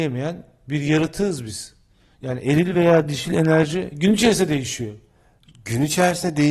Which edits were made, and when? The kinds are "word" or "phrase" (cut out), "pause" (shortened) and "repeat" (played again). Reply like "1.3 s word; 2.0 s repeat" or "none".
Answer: none